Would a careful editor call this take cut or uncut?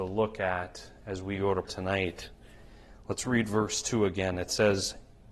cut